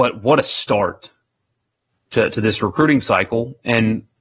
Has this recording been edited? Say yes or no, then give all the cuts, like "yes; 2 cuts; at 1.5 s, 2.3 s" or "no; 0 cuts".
no; 0 cuts